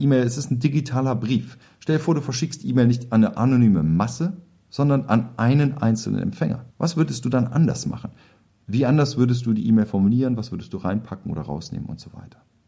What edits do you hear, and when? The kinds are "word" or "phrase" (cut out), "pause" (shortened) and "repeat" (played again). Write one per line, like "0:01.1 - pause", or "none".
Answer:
0:06.7 - pause